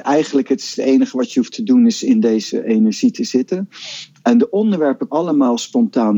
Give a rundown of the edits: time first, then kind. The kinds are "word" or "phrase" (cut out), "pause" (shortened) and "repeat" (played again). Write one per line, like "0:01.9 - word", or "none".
0:05.1 - word